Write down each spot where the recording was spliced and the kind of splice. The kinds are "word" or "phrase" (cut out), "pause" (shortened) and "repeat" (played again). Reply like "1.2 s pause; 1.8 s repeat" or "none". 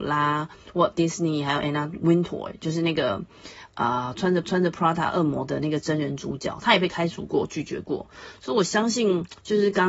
4.4 s repeat